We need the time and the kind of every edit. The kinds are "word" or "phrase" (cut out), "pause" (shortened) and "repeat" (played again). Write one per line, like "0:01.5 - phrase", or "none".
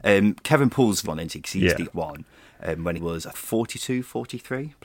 0:01.0 - word
0:01.9 - word
0:03.0 - word
0:03.3 - word